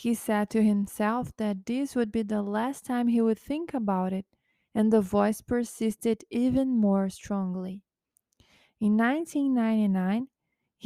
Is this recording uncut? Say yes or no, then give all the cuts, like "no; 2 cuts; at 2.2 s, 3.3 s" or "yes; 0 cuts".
yes; 0 cuts